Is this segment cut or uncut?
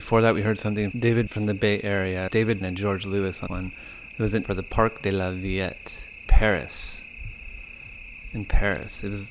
cut